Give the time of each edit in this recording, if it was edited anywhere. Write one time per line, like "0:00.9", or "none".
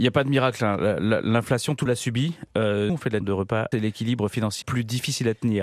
0:01.9
0:02.9
0:03.2
0:03.7
0:04.6

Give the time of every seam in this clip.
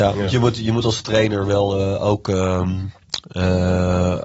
none

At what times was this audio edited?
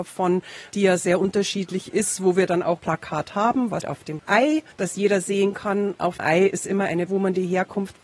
0:02.8
0:03.8
0:04.7
0:06.2
0:07.1

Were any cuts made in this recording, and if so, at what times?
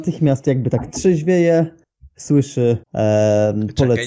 0:02.8

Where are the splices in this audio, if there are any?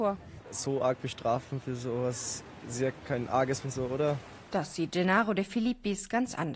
0:03.6

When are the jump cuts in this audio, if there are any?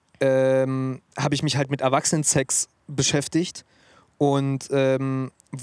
none

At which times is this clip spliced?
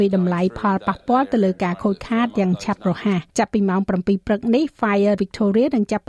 0:03.3
0:05.2

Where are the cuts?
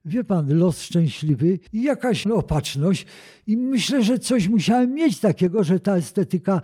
0:01.7

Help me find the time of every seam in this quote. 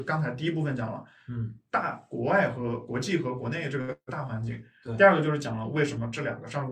none

